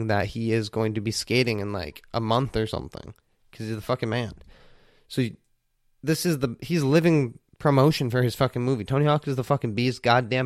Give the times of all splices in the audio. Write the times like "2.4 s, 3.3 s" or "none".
none